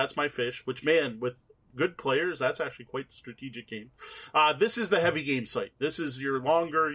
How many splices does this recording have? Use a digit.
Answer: 0